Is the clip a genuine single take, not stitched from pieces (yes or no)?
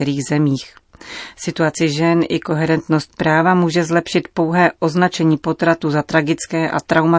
yes